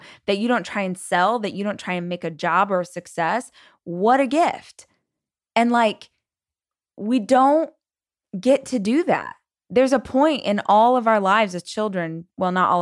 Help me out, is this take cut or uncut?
uncut